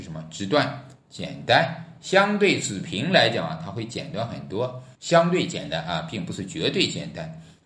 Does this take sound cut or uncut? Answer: cut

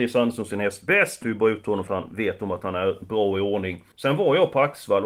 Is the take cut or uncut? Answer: cut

